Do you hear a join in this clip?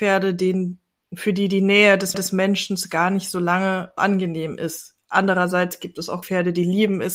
yes; 3 cuts; at 2.1 s, 4.0 s, 6.2 s

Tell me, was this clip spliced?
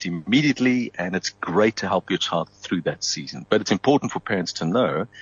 no; 0 cuts

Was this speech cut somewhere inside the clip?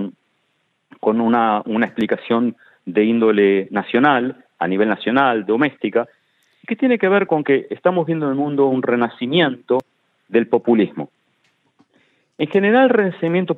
no; 0 cuts

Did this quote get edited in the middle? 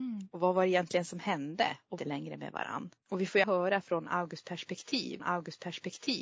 yes; 4 cuts; at 2.0 s, 3.0 s, 3.4 s, 5.2 s

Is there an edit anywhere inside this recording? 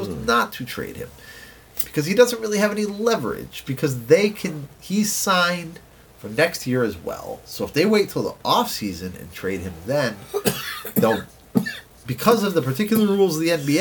no; 0 cuts

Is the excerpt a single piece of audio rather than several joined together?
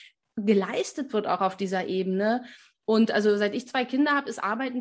yes; 0 cuts

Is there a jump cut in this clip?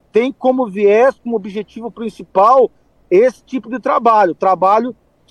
no; 0 cuts

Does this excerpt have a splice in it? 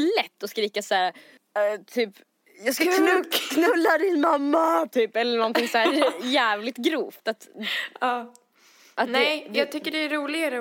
no; 0 cuts

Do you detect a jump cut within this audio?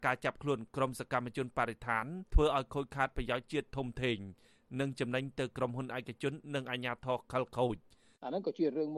yes; 1 cut; at 2.3 s

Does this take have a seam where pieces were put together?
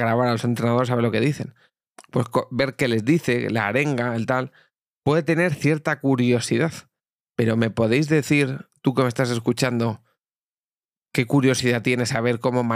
no; 0 cuts

